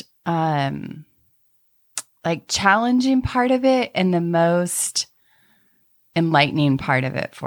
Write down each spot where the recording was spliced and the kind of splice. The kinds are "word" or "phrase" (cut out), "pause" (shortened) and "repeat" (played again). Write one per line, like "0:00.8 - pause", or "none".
none